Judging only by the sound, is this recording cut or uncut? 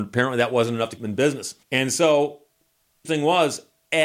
cut